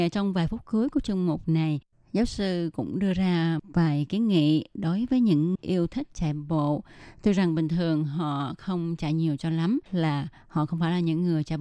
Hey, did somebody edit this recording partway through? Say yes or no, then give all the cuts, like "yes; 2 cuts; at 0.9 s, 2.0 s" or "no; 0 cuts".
yes; 3 cuts; at 3.6 s, 5.6 s, 9.9 s